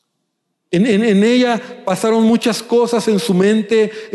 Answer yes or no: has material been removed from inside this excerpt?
no